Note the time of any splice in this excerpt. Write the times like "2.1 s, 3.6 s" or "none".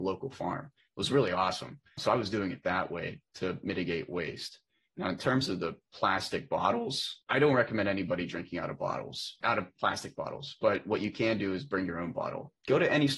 none